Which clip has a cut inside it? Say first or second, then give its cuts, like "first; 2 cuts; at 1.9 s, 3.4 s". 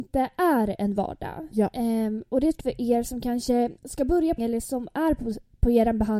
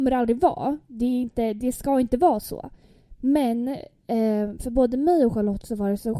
first; 3 cuts; at 2.6 s, 3.8 s, 4.4 s